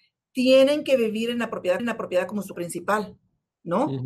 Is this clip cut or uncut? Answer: cut